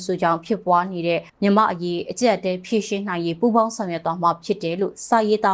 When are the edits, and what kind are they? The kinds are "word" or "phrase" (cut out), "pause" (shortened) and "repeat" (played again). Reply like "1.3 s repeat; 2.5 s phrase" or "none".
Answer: 1.3 s pause